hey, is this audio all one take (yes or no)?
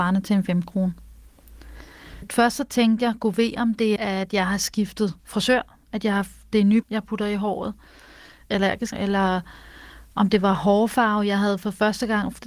no